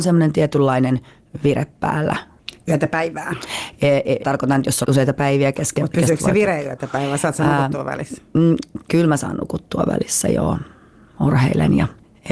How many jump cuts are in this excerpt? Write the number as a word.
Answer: two